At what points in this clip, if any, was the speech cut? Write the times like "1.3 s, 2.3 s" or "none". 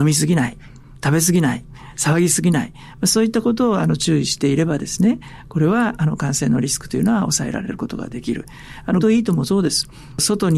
9.0 s